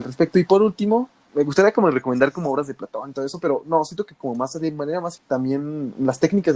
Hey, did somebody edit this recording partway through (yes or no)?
yes